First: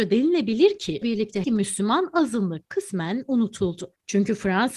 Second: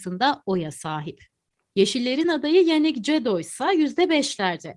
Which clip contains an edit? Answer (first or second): first